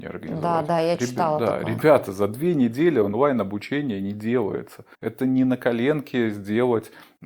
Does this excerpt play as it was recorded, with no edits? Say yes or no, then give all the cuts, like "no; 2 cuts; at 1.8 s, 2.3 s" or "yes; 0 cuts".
no; 1 cut; at 4.9 s